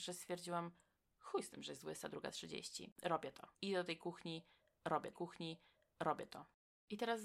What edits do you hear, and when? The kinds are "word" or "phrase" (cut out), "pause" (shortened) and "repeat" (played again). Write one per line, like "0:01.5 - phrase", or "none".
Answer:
0:02.9 - pause
0:03.5 - pause
0:05.1 - repeat